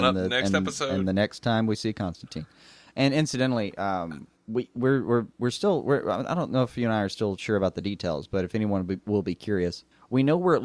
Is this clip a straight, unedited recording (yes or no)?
yes